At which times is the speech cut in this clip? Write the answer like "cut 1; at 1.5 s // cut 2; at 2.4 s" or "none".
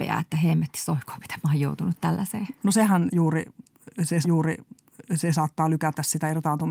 cut 1; at 4.2 s